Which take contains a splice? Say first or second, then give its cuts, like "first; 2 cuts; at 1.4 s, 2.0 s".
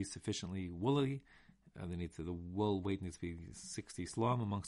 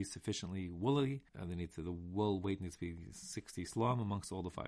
second; 1 cut; at 1.3 s